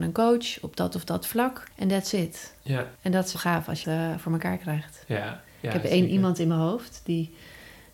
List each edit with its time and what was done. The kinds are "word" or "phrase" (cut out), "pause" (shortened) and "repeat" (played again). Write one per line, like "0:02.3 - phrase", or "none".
0:01.7 - pause
0:03.0 - pause
0:03.3 - word
0:03.8 - phrase